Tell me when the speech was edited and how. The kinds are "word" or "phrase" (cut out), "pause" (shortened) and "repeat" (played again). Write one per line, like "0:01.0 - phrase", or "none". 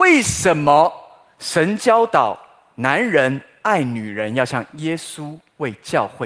none